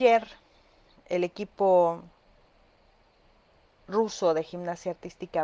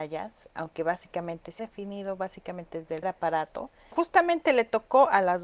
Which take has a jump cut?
second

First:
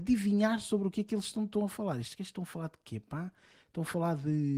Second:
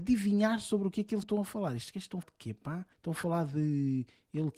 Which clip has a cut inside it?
second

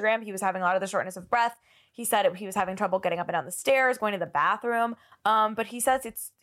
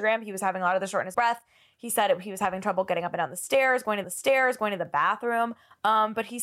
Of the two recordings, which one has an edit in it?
second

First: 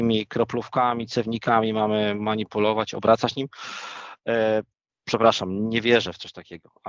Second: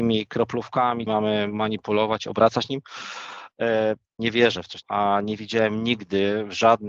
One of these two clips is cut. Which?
second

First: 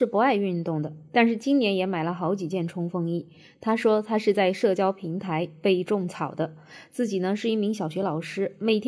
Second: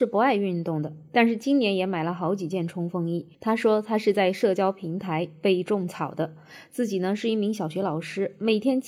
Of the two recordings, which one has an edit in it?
second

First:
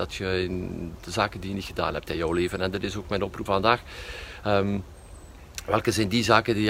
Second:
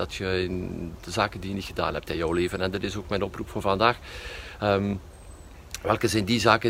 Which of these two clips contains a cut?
first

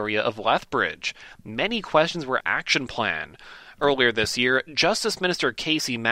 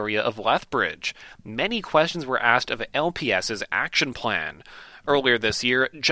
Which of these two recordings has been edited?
first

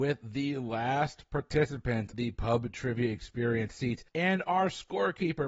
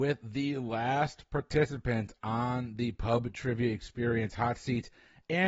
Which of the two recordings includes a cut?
first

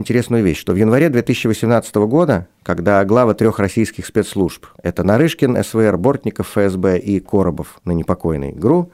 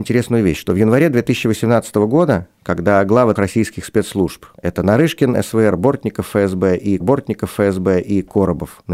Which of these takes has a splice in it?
second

